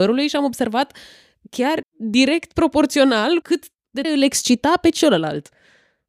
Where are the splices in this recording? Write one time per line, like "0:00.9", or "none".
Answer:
0:01.8
0:03.4
0:04.0